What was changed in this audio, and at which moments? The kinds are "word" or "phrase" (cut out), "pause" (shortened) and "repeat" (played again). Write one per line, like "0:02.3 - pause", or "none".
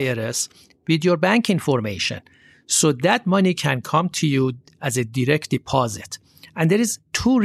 none